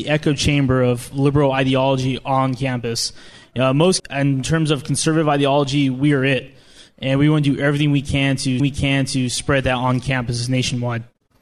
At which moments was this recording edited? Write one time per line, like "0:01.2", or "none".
0:04.0
0:08.6